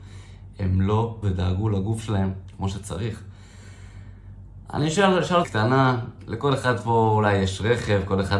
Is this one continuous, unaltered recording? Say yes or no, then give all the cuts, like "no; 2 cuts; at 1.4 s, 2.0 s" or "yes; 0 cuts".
no; 2 cuts; at 1.2 s, 5.4 s